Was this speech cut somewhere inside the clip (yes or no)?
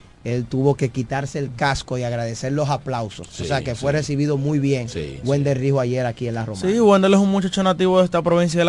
no